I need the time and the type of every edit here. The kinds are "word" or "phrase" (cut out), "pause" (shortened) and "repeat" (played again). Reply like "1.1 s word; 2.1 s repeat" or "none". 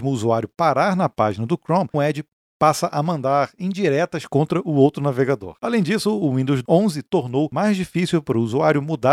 1.9 s word